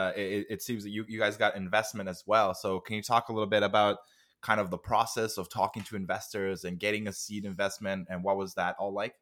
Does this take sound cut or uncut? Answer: uncut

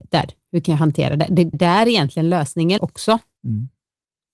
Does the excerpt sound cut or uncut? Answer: cut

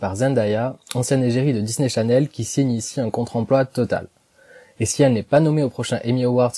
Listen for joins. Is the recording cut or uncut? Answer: uncut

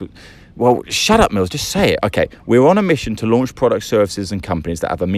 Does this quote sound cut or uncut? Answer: uncut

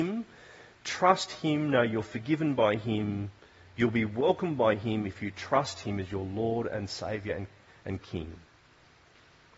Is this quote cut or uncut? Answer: uncut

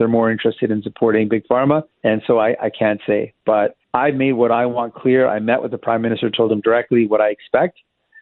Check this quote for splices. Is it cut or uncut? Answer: cut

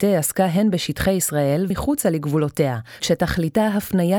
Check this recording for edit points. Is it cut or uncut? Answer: cut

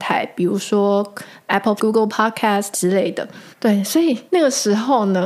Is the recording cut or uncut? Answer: cut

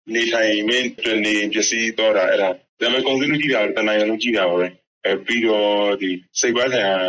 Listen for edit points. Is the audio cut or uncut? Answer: uncut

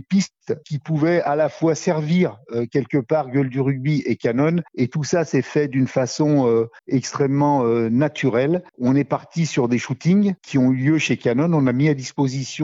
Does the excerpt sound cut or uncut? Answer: cut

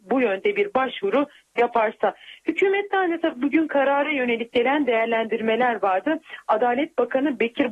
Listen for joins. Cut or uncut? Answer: uncut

